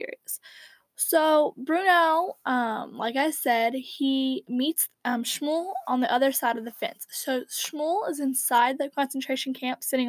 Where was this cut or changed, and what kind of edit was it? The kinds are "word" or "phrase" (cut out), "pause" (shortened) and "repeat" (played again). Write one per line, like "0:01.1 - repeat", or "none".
0:04.9 - pause